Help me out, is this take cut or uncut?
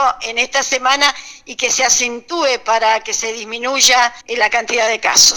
cut